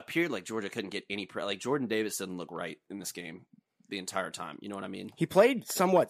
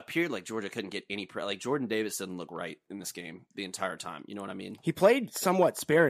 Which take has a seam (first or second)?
second